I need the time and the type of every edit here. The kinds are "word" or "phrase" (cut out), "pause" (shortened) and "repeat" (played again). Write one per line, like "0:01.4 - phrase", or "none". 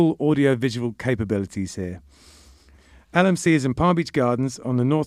none